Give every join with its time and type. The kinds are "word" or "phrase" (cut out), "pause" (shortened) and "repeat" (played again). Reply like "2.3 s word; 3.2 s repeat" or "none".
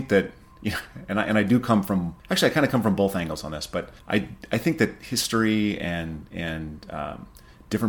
2.2 s pause; 4.0 s pause